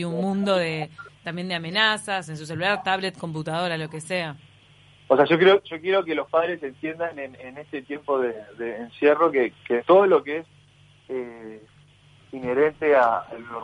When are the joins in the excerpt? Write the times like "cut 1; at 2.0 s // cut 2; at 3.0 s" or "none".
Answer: none